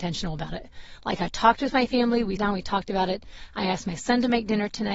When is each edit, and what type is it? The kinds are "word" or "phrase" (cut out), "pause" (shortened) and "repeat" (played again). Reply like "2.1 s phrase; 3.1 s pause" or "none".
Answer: 2.4 s word